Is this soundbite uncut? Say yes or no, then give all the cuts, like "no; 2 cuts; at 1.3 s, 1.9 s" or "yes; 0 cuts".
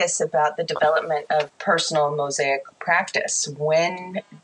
no; 2 cuts; at 1.5 s, 2.7 s